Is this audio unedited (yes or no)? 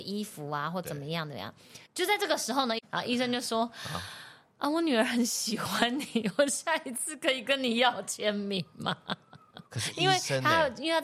no